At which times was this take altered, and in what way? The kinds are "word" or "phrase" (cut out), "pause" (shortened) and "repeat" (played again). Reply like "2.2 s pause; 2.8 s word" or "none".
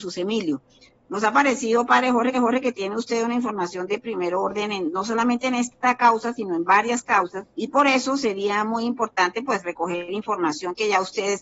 2.3 s repeat; 7.5 s pause